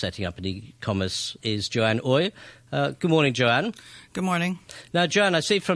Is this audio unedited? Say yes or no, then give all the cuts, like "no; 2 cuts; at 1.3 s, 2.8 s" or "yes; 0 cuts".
no; 1 cut; at 1.4 s